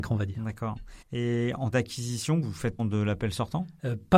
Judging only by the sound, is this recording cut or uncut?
cut